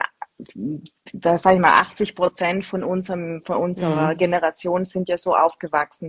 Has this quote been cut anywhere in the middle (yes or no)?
no